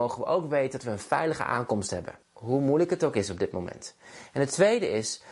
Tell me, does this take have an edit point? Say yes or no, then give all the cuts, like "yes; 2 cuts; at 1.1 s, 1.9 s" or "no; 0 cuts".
yes; 1 cut; at 2.2 s